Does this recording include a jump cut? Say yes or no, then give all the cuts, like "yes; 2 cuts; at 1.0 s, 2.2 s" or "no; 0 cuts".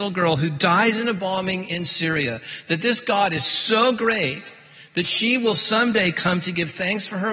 no; 0 cuts